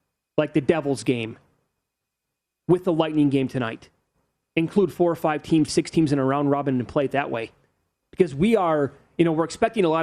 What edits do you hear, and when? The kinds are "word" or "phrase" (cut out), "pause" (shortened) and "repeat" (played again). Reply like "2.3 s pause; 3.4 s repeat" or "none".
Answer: 5.7 s word